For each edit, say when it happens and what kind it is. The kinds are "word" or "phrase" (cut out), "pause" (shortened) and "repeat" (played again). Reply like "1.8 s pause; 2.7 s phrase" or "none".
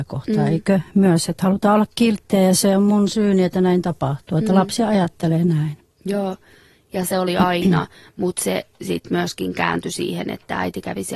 none